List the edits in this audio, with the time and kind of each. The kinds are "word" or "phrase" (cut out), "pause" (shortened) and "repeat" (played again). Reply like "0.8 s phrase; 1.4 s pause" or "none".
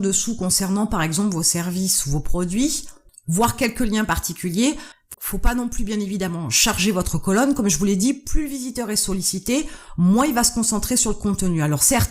5.2 s pause

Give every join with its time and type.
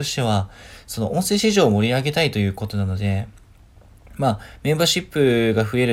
none

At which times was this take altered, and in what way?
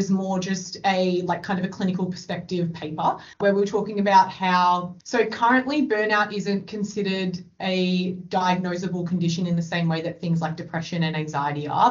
3.3 s pause; 5.0 s pause

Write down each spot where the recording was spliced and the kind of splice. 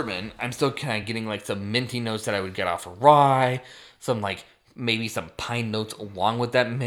none

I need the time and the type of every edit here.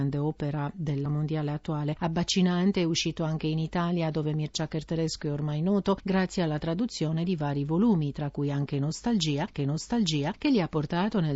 1.1 s word; 9.6 s repeat

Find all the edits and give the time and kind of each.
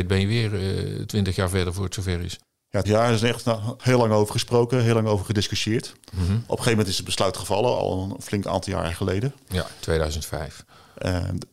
2.8 s word

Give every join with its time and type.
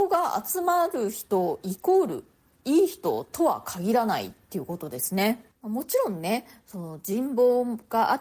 5.6 s pause

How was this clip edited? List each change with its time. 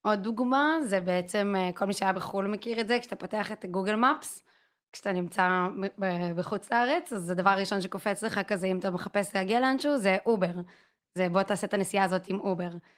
none

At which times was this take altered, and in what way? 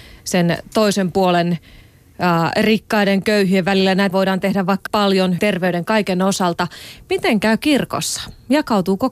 4.1 s word; 4.9 s word; 5.4 s word

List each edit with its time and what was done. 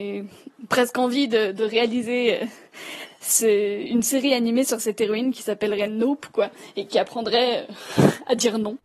none

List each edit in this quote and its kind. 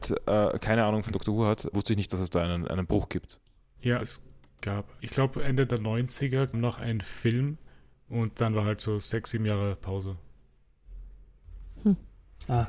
1.7 s word; 4.0 s word; 5.0 s word; 6.5 s word

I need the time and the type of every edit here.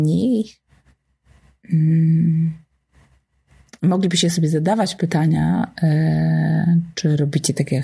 none

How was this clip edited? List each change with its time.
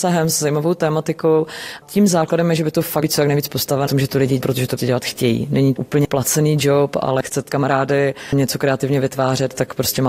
3.0 s word; 3.9 s word; 4.4 s word; 4.8 s word; 5.8 s word; 7.5 s word

